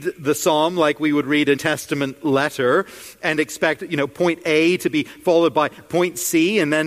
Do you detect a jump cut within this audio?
yes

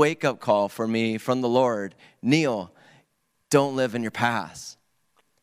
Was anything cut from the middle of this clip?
no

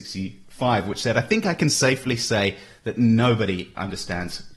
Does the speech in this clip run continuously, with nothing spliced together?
yes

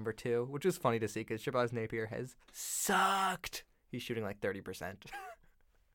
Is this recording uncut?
no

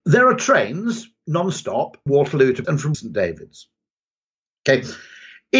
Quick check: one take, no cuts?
no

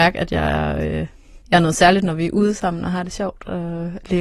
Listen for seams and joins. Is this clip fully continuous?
no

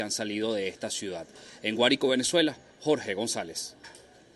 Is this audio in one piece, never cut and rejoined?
yes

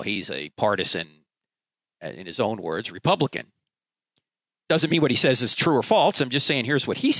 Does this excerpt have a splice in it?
no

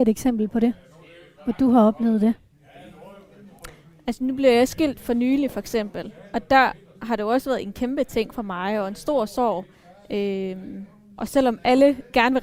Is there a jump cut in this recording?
no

